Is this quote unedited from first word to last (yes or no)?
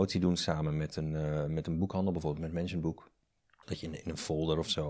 no